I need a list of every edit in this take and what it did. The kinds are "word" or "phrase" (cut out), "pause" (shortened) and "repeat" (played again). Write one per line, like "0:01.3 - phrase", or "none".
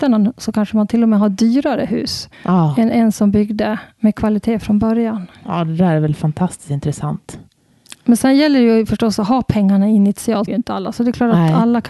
0:02.3 - pause
0:10.5 - phrase